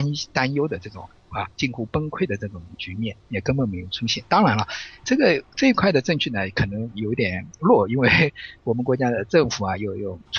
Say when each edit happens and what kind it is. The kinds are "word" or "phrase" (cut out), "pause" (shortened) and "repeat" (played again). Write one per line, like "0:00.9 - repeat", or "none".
0:01.5 - pause
0:05.0 - word